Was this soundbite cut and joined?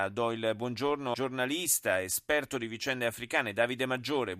yes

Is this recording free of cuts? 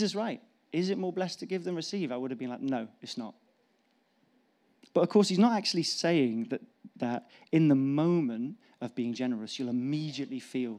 yes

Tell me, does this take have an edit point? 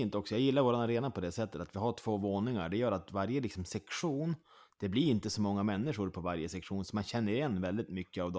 no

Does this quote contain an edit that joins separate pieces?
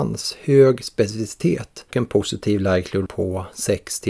yes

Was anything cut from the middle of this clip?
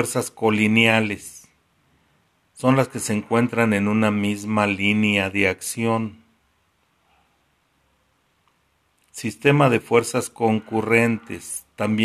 no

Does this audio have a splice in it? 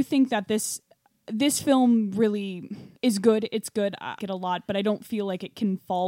yes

